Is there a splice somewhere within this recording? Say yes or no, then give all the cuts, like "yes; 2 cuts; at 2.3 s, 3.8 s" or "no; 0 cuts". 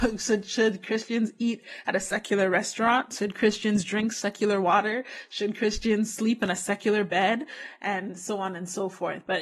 no; 0 cuts